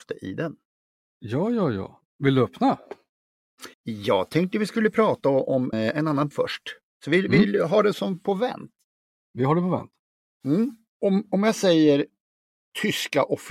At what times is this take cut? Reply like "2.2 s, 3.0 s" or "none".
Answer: 2.1 s, 3.7 s, 5.7 s, 6.3 s, 7.9 s, 10.9 s